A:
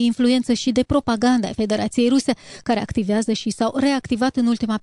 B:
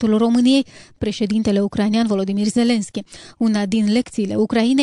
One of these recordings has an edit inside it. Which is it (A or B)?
B